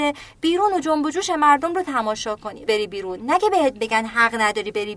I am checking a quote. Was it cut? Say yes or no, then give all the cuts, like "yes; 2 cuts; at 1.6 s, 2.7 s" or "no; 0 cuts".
yes; 1 cut; at 2.7 s